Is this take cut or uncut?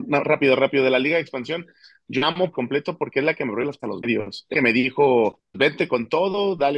cut